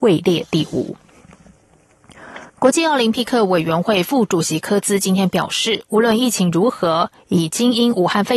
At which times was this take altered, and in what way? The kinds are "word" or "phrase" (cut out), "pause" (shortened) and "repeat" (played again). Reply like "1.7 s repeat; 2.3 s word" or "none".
2.5 s pause

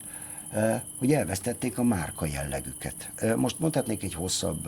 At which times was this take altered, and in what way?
none

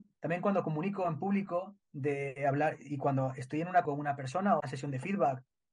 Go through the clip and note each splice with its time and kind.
1.8 s pause; 3.8 s word; 4.6 s phrase

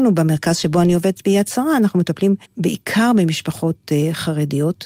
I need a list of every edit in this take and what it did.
2.5 s pause

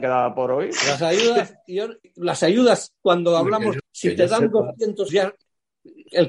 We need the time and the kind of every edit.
2.0 s word; 3.8 s word; 5.1 s word

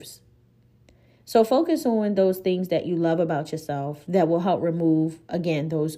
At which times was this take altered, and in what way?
none

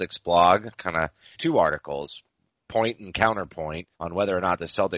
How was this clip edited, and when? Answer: 1.3 s word; 3.9 s pause

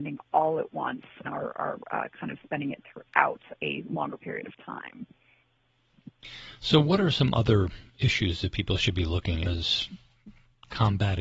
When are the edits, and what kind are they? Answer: 1.2 s phrase; 9.5 s phrase

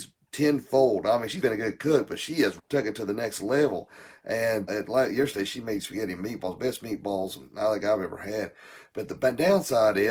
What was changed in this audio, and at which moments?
1.4 s word; 2.6 s word; 4.7 s word

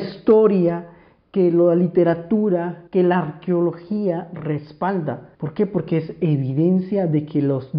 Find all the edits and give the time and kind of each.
2.9 s pause; 5.3 s pause

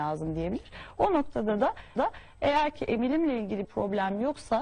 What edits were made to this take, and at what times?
2.0 s repeat; 3.6 s word

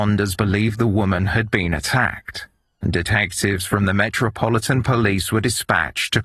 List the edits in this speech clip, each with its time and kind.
none

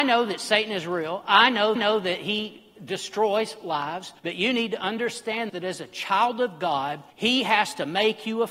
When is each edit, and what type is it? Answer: 1.8 s repeat; 4.2 s pause; 5.5 s word; 7.1 s pause

